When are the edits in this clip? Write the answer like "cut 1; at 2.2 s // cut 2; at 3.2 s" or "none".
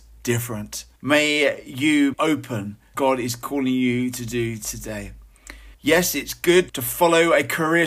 cut 1; at 1.0 s // cut 2; at 2.1 s // cut 3; at 2.9 s // cut 4; at 5.7 s // cut 5; at 6.7 s